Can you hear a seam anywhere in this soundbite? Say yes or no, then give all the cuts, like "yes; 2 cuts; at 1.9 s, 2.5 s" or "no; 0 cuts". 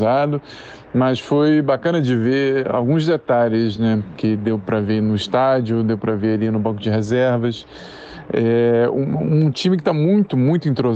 no; 0 cuts